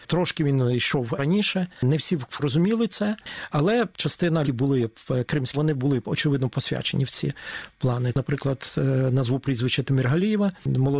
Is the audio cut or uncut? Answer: cut